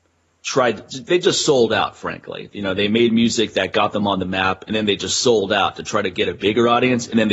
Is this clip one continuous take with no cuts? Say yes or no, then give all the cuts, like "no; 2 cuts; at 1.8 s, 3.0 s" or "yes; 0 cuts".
yes; 0 cuts